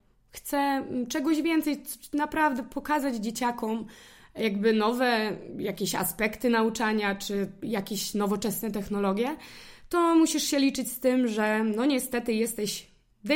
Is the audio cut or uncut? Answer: uncut